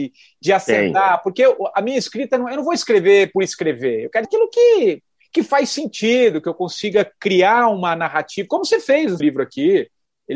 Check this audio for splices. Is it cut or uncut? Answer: cut